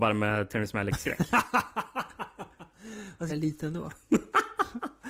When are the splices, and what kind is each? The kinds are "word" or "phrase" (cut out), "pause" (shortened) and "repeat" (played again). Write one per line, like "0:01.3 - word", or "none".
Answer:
0:03.3 - phrase